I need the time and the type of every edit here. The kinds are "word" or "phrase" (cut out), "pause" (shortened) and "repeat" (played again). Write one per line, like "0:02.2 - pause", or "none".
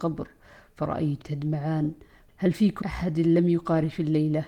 0:01.2 - word
0:02.3 - word
0:02.8 - word